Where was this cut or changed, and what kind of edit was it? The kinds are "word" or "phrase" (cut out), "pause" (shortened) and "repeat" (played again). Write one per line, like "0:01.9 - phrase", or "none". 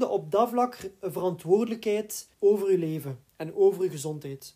0:02.3 - pause